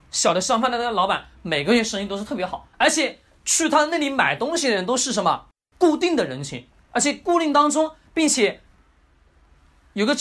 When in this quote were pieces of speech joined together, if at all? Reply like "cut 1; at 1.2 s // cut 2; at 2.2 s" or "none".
cut 1; at 2.7 s // cut 2; at 3.4 s // cut 3; at 5.6 s